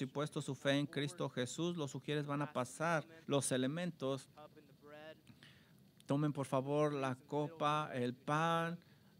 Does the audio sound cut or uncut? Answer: cut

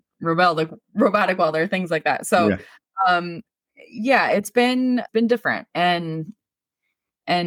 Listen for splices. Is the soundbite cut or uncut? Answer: uncut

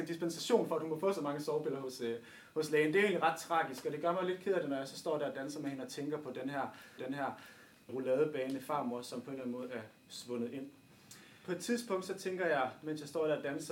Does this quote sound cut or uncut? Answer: cut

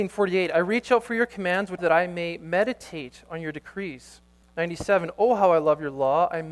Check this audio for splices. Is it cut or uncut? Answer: cut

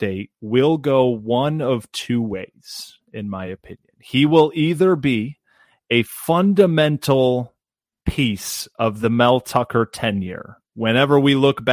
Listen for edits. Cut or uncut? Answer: uncut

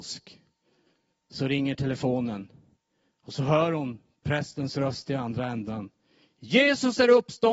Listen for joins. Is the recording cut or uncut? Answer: uncut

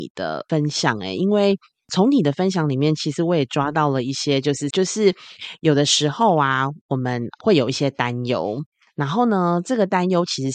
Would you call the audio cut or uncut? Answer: cut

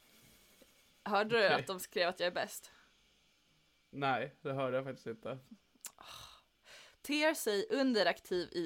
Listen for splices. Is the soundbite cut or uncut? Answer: uncut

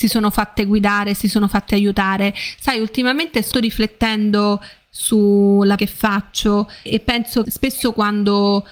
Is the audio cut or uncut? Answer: cut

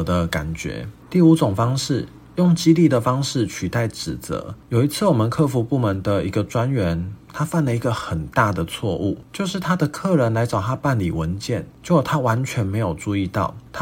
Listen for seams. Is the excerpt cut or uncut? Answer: uncut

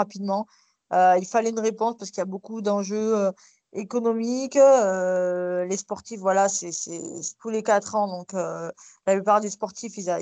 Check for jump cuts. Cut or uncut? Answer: uncut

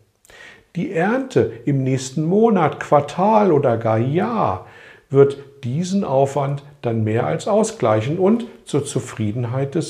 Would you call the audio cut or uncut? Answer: uncut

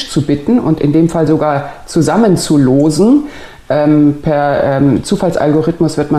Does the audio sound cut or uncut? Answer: uncut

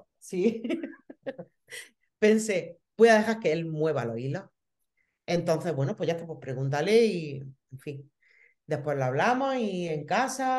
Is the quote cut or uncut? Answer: uncut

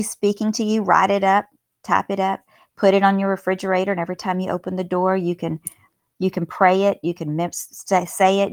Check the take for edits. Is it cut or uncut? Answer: uncut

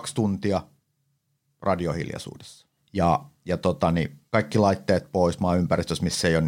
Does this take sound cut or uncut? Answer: cut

